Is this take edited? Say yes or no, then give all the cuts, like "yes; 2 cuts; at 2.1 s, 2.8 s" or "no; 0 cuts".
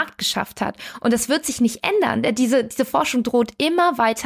no; 0 cuts